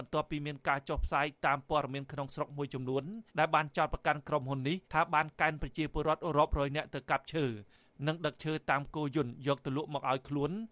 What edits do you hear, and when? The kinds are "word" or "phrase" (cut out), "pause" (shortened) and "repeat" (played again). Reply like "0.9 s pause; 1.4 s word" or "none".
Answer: 3.3 s pause; 4.8 s pause